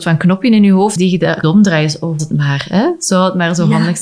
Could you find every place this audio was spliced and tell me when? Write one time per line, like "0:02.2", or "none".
0:01.0
0:01.4
0:02.2

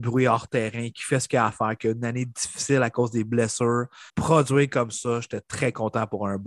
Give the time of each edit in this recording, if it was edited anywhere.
0:04.1

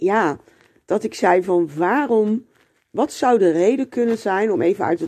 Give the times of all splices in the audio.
none

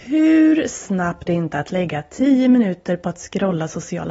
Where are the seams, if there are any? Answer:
0:01.3

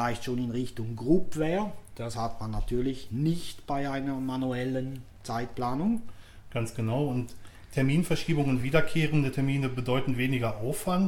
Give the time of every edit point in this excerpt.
none

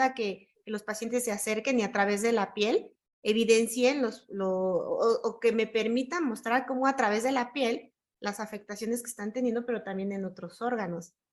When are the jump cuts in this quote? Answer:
none

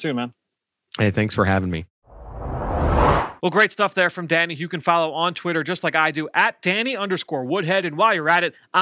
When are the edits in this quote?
none

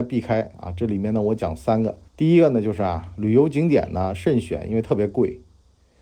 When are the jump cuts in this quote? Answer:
0:02.1

